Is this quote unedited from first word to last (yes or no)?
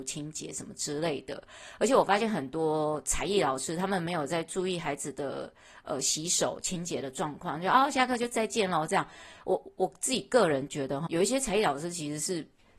no